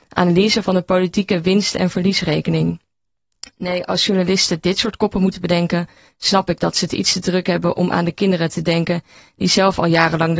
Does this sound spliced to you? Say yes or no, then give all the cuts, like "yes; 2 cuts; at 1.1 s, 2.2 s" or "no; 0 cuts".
no; 0 cuts